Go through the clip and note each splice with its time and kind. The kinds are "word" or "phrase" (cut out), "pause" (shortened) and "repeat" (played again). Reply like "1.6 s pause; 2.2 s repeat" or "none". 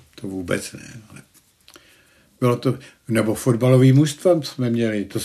none